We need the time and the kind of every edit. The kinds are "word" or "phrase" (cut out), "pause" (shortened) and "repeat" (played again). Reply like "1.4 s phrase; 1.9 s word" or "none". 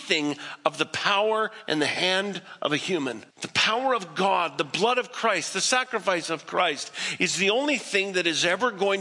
3.3 s pause

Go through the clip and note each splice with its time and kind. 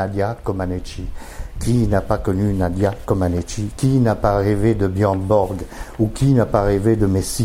none

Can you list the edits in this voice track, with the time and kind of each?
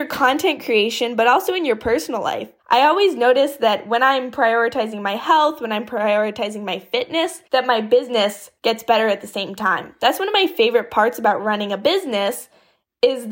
2.6 s pause; 7.4 s pause; 8.6 s pause

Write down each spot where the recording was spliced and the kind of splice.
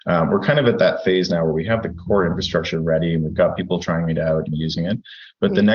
none

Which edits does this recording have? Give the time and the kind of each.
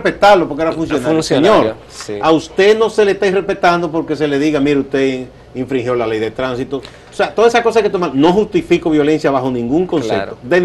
none

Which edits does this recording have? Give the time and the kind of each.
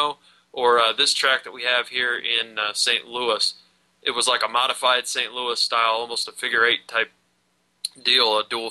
none

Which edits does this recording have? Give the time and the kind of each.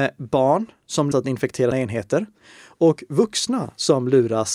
1.1 s word; 1.7 s word

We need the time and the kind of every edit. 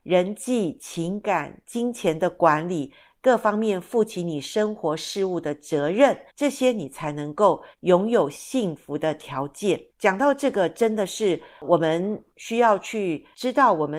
6.3 s pause; 7.7 s pause; 9.9 s pause; 12.3 s pause

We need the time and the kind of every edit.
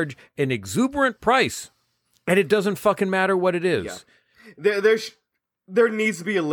none

